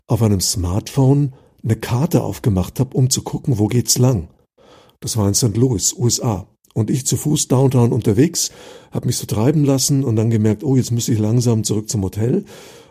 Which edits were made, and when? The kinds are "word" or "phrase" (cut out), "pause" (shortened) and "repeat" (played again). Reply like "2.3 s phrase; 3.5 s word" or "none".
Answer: none